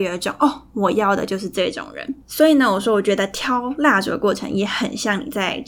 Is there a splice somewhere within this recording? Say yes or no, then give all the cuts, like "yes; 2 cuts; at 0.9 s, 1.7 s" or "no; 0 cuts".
yes; 1 cut; at 2.2 s